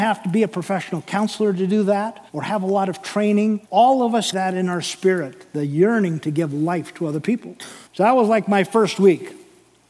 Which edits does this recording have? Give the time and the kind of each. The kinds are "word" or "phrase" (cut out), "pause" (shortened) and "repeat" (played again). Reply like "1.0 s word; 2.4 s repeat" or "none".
2.3 s pause; 3.6 s pause; 4.3 s word; 7.9 s pause